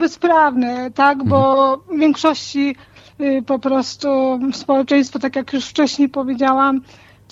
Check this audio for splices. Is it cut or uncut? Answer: uncut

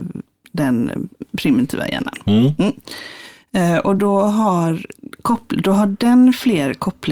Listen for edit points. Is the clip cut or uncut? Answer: uncut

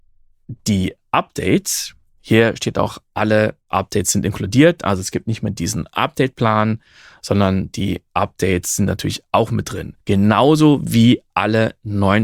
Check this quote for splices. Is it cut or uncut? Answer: cut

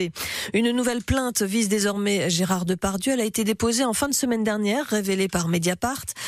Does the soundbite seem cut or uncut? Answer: uncut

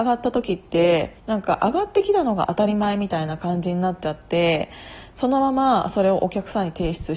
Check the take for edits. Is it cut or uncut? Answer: cut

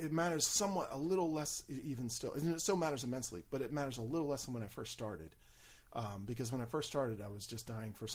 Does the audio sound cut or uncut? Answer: uncut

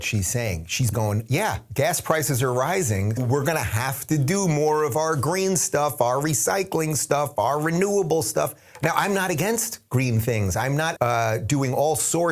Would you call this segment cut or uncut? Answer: cut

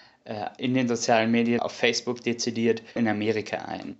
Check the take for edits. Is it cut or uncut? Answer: cut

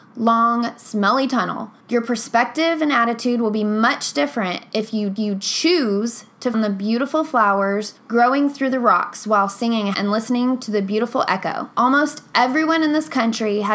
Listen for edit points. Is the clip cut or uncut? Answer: cut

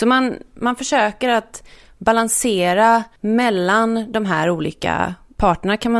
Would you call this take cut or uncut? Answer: cut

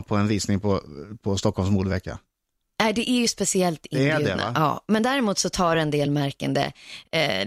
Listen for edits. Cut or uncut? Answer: uncut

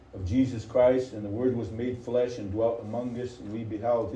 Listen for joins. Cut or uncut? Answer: uncut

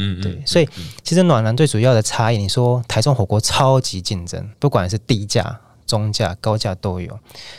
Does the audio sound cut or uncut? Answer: cut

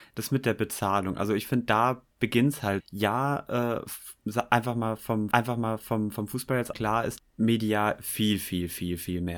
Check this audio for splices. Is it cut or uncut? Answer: cut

